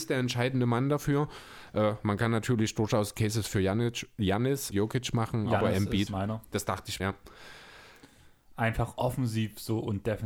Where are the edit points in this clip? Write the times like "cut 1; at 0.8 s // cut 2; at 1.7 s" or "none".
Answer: cut 1; at 4.7 s // cut 2; at 6.1 s // cut 3; at 7.0 s